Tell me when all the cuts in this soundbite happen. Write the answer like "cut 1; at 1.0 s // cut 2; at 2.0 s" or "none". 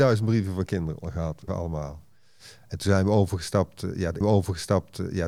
cut 1; at 1.5 s // cut 2; at 4.2 s